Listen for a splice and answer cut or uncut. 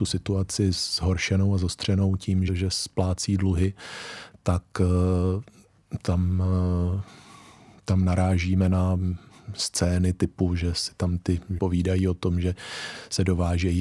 cut